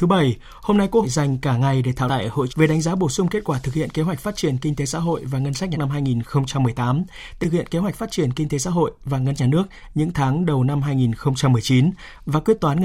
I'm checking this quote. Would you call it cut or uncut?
cut